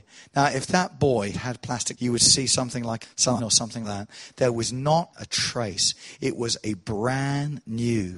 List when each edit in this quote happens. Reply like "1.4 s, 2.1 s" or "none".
1.3 s, 1.9 s, 3.0 s, 3.4 s, 3.8 s, 5.1 s